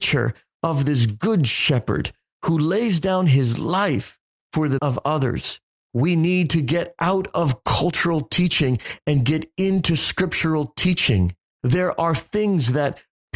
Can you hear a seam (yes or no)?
yes